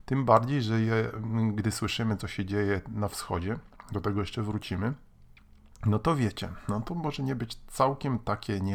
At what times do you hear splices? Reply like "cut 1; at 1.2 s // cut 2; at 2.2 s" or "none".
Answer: none